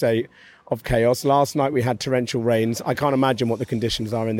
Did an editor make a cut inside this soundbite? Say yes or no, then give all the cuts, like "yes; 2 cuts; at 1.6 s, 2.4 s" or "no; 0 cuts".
no; 0 cuts